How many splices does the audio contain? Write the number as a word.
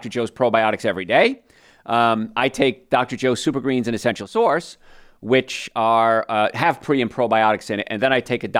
zero